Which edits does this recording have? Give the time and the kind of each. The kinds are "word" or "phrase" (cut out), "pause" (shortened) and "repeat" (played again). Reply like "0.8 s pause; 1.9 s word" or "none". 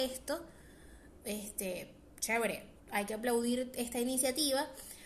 2.8 s pause